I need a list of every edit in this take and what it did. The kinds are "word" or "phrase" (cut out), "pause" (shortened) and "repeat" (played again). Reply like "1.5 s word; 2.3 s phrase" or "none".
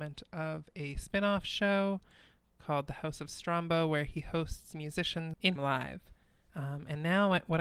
5.6 s phrase